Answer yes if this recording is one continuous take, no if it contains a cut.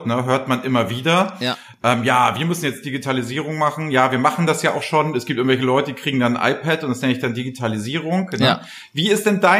yes